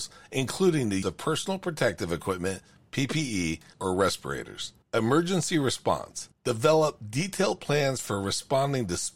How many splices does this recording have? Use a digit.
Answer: 4